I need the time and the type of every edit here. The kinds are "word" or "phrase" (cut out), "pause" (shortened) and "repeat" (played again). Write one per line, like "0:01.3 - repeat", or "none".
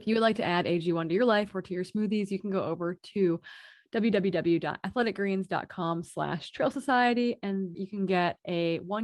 0:07.7 - word